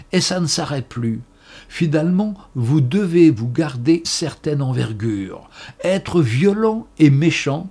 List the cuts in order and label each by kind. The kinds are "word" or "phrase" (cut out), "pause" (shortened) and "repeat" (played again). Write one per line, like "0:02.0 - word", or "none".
0:04.0 - word

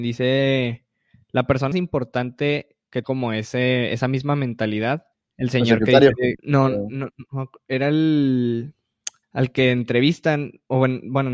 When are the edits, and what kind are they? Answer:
0:01.7 - word
0:03.0 - word
0:05.1 - pause
0:06.4 - pause
0:09.2 - pause

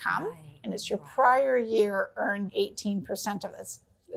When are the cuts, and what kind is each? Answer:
0:02.5 - word

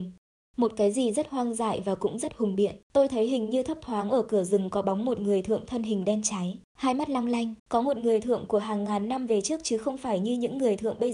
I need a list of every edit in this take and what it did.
0:02.8 - pause
0:06.6 - pause
0:07.6 - pause

